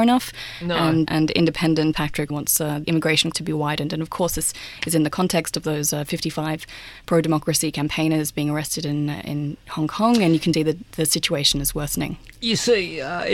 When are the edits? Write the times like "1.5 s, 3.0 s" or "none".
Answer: 1.1 s, 1.9 s, 2.3 s, 2.8 s, 3.3 s, 10.5 s